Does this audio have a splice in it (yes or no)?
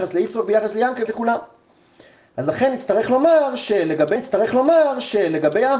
yes